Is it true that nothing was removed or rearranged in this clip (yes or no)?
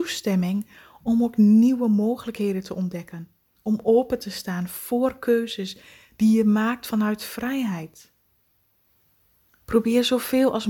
yes